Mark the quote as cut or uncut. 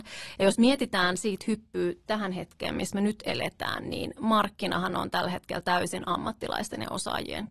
uncut